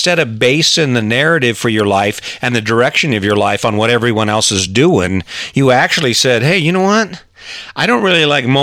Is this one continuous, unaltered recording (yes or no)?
yes